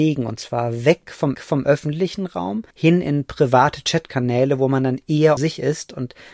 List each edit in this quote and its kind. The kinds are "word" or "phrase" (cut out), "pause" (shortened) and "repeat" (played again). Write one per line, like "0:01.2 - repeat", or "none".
0:01.3 - repeat
0:02.7 - pause
0:05.4 - word